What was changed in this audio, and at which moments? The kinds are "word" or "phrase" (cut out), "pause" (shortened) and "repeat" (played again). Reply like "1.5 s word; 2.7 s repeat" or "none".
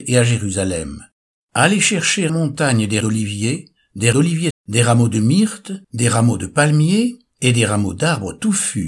1.2 s pause; 2.3 s word; 3.0 s word; 4.1 s word; 4.5 s word; 5.8 s pause